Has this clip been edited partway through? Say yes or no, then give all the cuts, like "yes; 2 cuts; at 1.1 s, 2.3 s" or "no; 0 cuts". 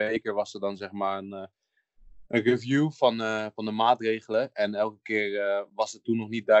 no; 0 cuts